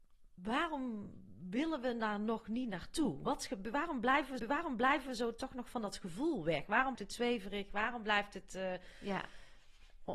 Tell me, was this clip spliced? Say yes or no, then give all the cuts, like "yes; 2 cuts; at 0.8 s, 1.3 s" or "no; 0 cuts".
yes; 2 cuts; at 4.4 s, 6.9 s